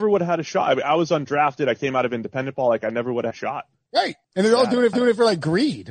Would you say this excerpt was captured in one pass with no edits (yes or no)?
no